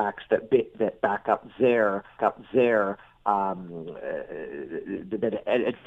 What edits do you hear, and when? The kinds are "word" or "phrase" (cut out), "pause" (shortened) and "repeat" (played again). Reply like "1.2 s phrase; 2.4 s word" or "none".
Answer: 2.2 s repeat